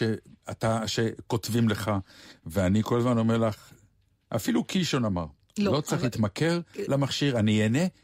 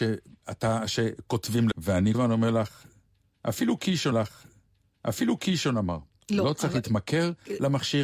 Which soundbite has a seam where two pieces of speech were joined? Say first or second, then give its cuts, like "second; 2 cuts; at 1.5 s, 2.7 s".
second; 3 cuts; at 1.7 s, 2.1 s, 4.1 s